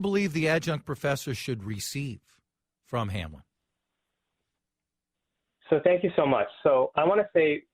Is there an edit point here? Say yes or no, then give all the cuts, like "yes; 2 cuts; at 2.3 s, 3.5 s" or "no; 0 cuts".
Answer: no; 0 cuts